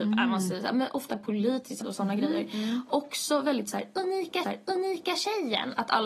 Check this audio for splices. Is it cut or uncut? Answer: cut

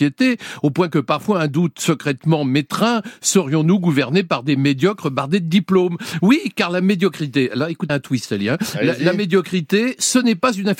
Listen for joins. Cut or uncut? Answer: cut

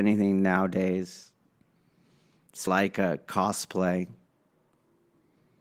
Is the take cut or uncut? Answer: cut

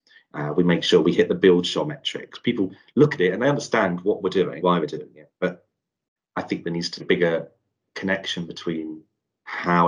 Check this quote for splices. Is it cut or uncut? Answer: cut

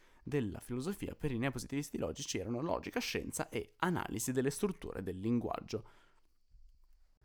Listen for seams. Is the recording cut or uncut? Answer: uncut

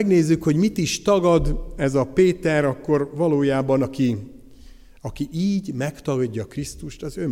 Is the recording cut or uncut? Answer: uncut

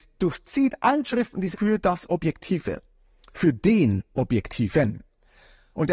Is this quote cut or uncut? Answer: cut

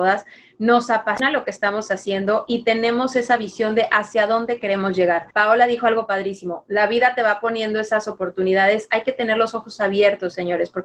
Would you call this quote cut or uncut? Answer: cut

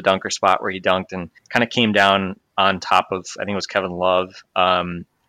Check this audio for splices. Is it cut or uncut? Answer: cut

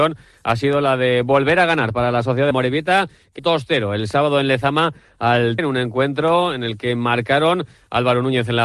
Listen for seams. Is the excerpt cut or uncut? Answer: cut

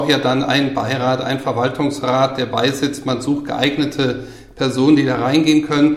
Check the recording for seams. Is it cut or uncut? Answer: uncut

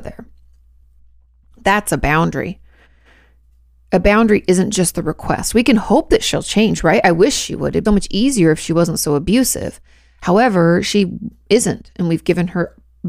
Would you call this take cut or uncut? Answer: cut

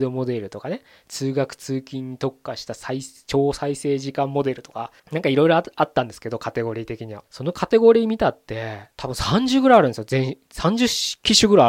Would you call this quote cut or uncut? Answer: cut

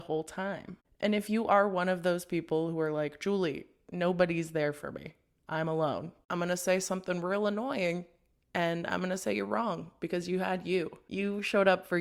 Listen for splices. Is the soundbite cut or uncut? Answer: uncut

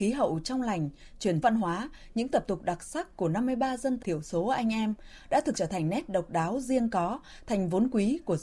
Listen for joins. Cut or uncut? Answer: cut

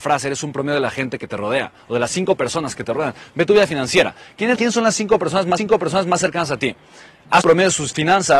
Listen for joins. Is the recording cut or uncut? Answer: cut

